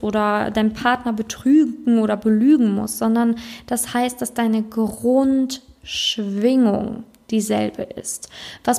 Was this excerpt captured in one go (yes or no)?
yes